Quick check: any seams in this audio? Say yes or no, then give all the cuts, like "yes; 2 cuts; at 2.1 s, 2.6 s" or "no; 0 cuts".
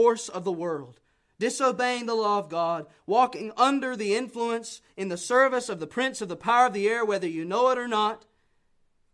no; 0 cuts